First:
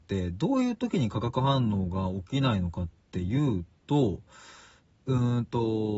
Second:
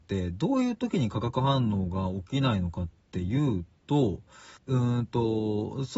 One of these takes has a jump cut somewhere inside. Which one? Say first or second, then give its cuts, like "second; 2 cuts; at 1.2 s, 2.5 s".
second; 1 cut; at 4.6 s